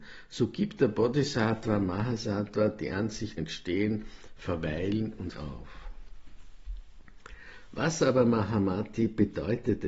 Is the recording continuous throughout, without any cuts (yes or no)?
no